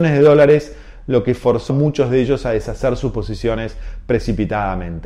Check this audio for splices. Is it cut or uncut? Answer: cut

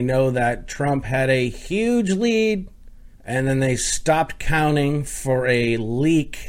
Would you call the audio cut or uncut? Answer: cut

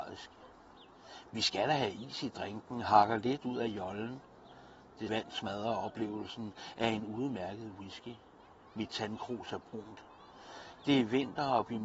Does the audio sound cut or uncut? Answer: cut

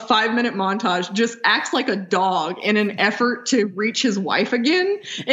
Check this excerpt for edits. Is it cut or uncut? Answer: uncut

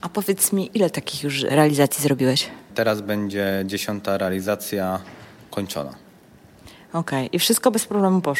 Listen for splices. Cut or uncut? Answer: uncut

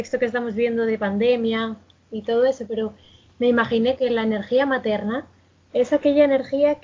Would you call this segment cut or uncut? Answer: cut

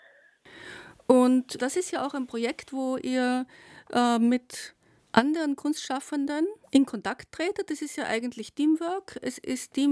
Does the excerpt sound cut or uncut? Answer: cut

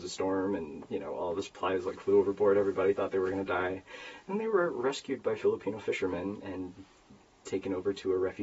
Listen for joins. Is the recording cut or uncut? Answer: uncut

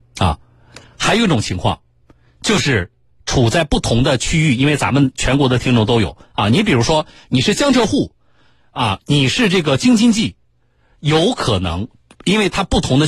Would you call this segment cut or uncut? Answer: uncut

